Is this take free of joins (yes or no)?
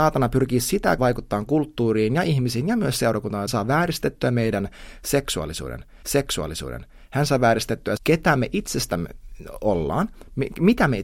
no